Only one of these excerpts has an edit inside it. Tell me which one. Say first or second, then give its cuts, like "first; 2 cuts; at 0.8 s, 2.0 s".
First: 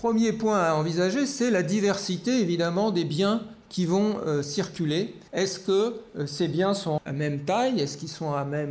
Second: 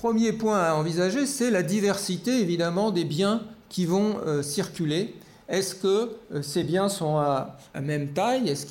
first; 2 cuts; at 5.3 s, 7.0 s